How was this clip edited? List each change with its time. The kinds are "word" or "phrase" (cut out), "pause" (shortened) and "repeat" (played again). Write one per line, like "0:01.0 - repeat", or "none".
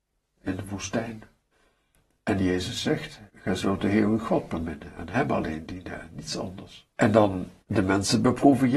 0:01.5 - pause
0:03.3 - pause
0:06.9 - pause
0:07.6 - pause